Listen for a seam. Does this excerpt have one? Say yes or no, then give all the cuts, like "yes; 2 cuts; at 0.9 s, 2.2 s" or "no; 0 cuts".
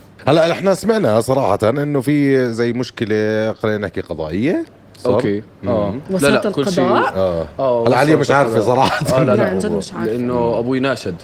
no; 0 cuts